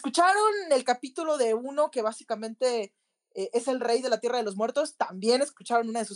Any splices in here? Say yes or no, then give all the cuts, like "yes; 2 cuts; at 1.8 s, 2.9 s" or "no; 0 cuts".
no; 0 cuts